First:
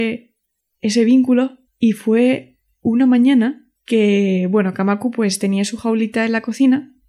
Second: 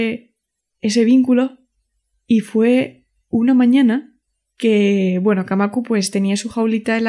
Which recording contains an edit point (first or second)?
first